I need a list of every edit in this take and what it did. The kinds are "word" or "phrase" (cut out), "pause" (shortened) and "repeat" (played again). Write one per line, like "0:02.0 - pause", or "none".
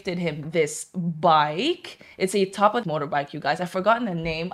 0:02.8 - phrase